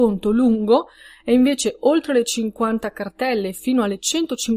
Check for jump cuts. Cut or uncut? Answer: uncut